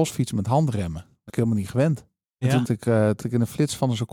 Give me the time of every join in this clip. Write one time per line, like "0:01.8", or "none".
0:01.3
0:02.6
0:03.2